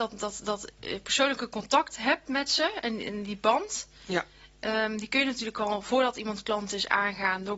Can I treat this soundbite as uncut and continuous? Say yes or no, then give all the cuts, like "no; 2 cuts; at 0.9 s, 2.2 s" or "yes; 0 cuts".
yes; 0 cuts